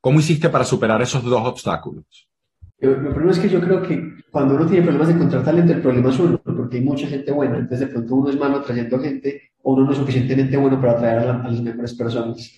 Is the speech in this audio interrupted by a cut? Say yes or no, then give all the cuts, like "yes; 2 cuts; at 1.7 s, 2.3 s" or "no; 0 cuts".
yes; 3 cuts; at 2.7 s, 4.2 s, 9.5 s